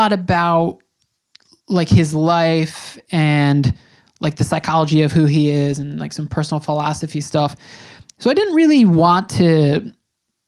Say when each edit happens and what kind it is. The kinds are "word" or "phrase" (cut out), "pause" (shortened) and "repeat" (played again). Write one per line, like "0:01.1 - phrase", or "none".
none

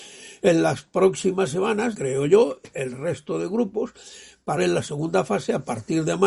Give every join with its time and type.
0:01.9 - word
0:04.6 - word

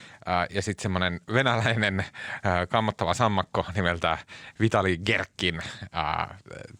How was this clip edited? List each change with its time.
0:01.2 - pause

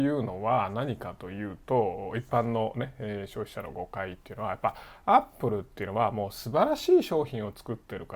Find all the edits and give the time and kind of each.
none

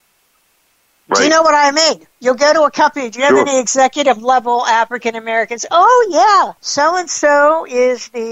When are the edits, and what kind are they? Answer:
0:02.1 - pause
0:06.6 - pause

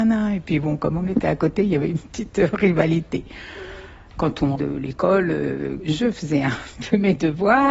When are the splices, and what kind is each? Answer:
0:04.6 - word

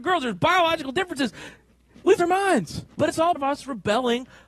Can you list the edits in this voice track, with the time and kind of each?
0:02.2 - word
0:03.0 - word
0:03.4 - word

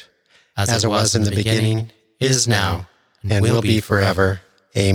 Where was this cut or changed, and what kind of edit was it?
none

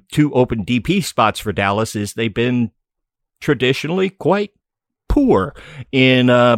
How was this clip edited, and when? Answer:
none

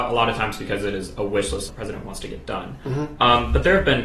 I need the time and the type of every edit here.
0:01.7 - phrase

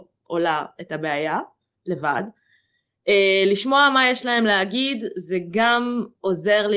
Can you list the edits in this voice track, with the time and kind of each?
none

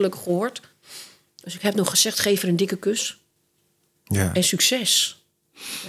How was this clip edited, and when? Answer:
none

